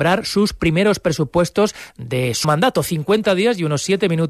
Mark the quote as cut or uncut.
cut